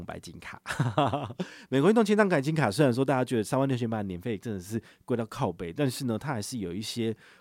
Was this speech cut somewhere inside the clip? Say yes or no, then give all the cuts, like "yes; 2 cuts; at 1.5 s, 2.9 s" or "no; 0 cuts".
no; 0 cuts